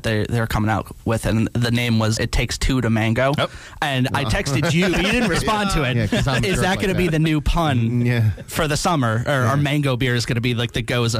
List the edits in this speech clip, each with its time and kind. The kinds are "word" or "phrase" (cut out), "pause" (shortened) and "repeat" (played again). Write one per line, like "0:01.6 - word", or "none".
0:02.2 - word
0:04.9 - word